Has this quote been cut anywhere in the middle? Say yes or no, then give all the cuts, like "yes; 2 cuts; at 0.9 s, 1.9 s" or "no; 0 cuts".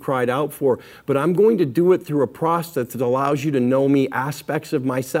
no; 0 cuts